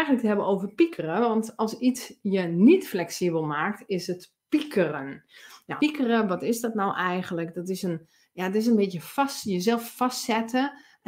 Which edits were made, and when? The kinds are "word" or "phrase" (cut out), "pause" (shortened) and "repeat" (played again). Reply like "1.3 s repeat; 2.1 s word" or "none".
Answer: 5.8 s word